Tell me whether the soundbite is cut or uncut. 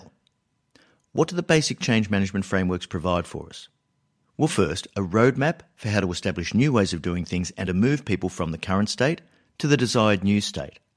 uncut